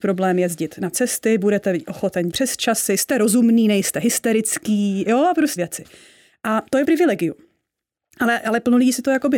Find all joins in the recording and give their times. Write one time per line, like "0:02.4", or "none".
0:00.9
0:02.3
0:05.6
0:06.8